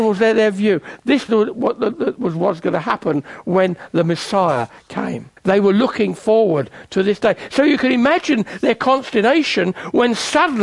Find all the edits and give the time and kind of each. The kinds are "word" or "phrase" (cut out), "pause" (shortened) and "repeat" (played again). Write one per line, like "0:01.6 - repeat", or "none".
0:01.3 - word
0:05.4 - pause